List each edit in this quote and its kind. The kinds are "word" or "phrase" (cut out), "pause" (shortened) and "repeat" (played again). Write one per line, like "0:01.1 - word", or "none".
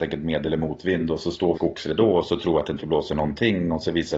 0:01.5 - phrase